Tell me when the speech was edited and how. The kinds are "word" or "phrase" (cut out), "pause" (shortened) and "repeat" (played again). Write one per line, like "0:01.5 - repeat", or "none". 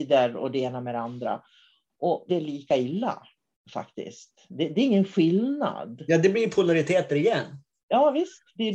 0:02.3 - phrase